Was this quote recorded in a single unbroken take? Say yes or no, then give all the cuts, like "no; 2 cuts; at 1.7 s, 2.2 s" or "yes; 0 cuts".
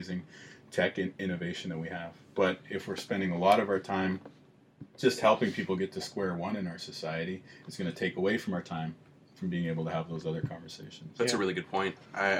yes; 0 cuts